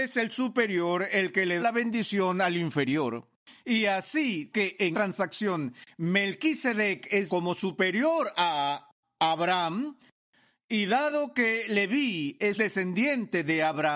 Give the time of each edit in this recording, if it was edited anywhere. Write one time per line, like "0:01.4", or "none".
0:01.6
0:04.5
0:04.9
0:07.3
0:12.6